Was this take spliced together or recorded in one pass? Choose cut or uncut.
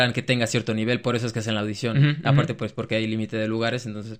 uncut